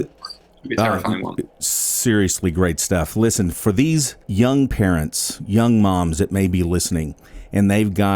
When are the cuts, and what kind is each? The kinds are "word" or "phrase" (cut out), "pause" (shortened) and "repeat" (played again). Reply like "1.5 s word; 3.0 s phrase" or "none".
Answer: 1.5 s pause; 4.2 s pause